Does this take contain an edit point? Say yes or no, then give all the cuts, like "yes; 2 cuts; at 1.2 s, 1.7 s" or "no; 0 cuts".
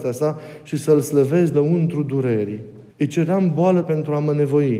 yes; 3 cuts; at 1.5 s, 2.9 s, 3.8 s